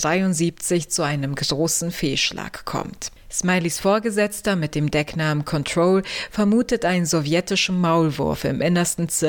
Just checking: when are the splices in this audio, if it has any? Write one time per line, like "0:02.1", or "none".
none